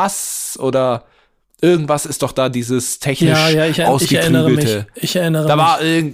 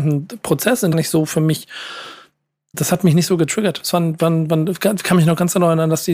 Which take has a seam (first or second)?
second